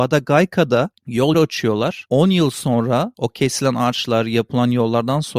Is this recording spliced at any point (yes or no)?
yes